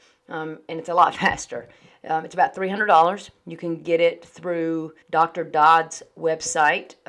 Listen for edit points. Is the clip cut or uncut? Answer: cut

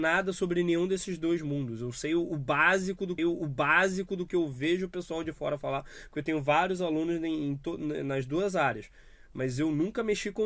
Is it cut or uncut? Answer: cut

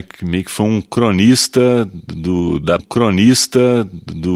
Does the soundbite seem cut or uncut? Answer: cut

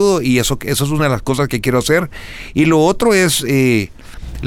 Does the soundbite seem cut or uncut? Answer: uncut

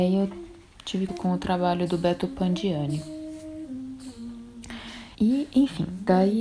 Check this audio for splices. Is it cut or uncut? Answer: cut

